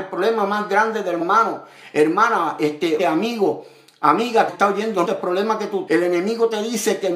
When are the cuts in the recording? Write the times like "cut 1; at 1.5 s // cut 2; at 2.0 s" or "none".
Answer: cut 1; at 1.2 s // cut 2; at 3.0 s // cut 3; at 4.5 s // cut 4; at 5.0 s // cut 5; at 5.9 s